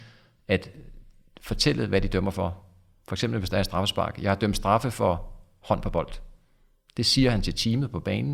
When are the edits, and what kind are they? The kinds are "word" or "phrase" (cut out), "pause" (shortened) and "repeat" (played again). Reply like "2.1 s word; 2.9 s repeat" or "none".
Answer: none